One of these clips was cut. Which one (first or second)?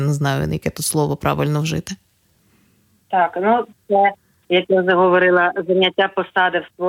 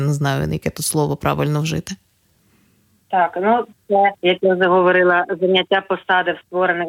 second